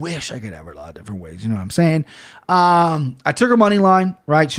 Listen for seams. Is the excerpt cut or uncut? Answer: uncut